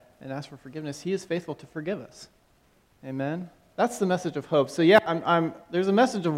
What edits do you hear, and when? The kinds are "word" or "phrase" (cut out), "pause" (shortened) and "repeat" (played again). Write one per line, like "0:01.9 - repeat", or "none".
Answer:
none